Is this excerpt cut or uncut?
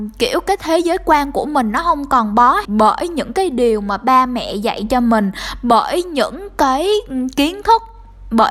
cut